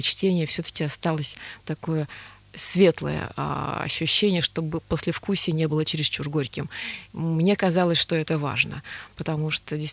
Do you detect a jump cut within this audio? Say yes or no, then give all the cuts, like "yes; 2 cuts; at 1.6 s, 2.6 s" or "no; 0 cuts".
no; 0 cuts